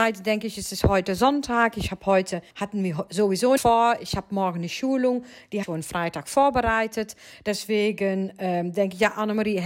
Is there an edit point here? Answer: yes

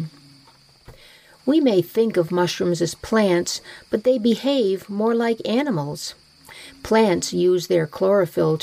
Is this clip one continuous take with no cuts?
yes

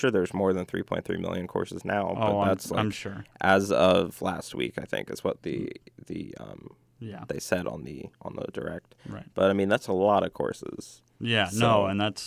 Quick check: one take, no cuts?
no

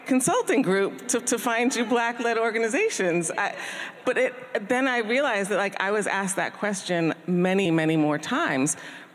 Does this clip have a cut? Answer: yes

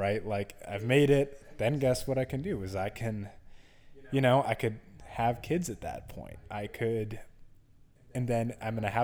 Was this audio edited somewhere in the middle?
no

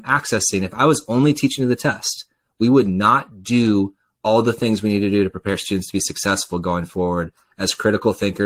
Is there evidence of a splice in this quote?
no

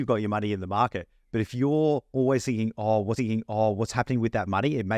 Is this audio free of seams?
no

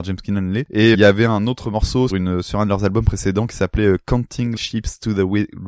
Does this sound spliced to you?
yes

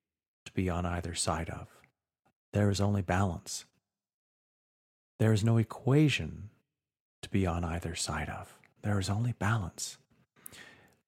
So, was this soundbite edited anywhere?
no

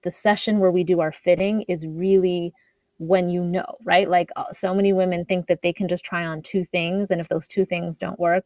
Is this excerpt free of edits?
yes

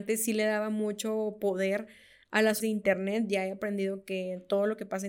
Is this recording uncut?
no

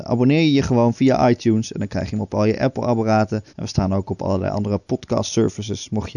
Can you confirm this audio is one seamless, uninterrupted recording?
no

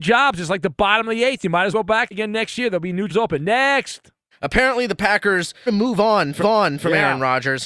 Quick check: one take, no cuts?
no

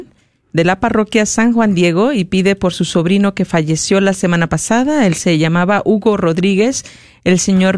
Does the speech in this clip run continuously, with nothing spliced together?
yes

